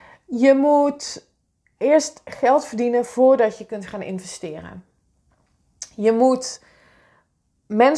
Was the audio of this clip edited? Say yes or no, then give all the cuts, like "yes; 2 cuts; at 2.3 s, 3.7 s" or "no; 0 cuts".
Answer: no; 0 cuts